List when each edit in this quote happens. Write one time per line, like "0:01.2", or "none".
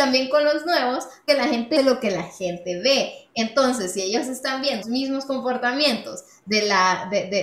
0:01.3
0:01.8
0:04.8